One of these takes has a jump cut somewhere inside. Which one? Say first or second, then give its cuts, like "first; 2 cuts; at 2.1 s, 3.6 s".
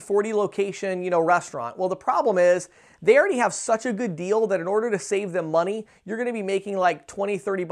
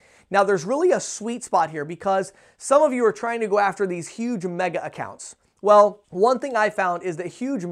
second; 1 cut; at 6.0 s